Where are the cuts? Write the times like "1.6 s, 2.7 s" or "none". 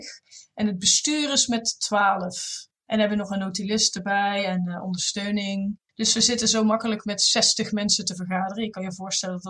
2.8 s, 5.8 s